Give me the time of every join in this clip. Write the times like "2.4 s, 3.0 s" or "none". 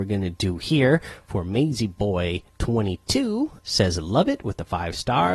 2.5 s, 3.6 s